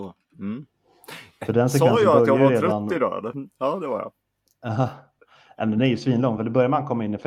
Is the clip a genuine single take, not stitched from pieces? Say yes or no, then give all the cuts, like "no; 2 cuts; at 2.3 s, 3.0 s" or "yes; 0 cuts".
yes; 0 cuts